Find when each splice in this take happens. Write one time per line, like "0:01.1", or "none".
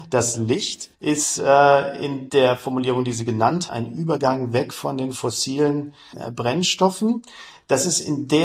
0:00.9
0:03.7